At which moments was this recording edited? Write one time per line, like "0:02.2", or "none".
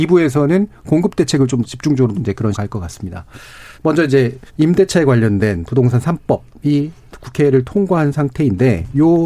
0:01.6
0:02.1
0:02.5
0:03.7
0:04.5